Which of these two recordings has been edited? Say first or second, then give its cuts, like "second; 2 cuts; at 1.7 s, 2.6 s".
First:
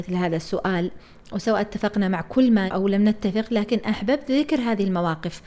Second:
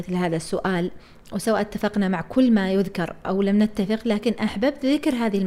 first; 1 cut; at 2.7 s